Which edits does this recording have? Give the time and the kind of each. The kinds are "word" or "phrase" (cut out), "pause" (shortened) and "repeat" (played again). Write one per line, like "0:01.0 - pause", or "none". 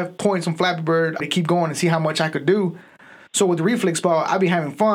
0:01.2 - word

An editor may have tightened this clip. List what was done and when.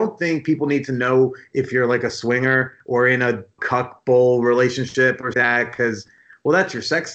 0:03.6 - phrase
0:05.3 - phrase

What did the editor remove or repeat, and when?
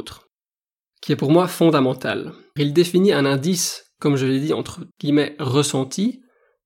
0:02.6 - word
0:04.9 - pause

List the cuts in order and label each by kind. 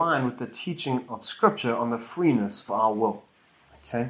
0:02.7 - word

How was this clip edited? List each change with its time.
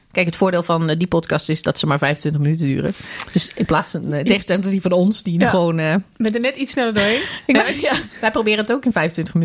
none

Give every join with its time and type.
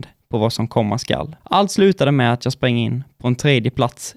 0:01.4 - pause

